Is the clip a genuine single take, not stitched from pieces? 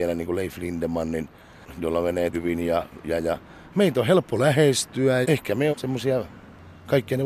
no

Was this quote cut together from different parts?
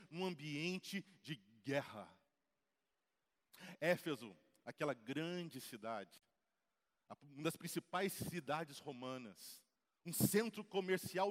no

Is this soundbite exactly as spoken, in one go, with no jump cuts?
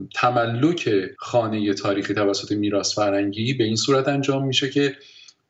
no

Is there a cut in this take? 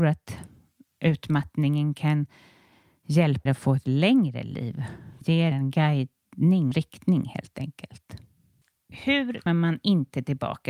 yes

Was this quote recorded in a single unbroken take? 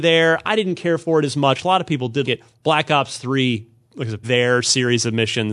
no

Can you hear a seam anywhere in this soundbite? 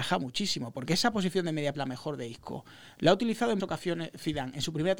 yes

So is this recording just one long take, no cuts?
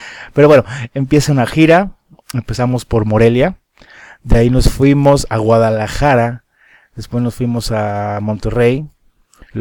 yes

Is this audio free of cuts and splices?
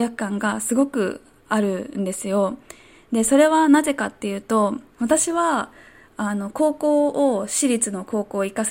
yes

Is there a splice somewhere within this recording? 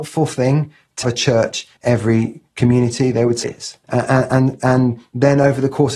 yes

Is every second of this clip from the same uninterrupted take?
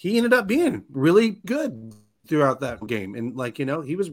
no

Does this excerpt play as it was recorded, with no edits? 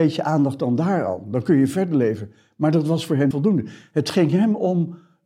no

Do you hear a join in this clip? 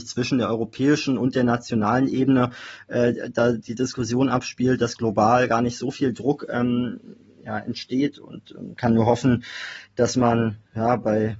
no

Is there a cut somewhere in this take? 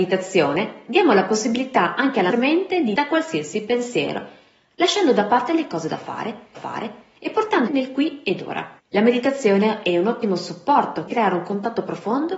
yes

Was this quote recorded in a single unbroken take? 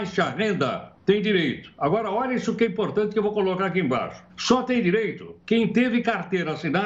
no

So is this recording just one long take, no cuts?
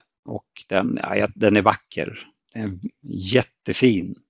yes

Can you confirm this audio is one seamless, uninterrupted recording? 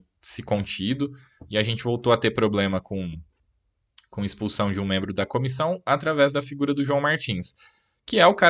yes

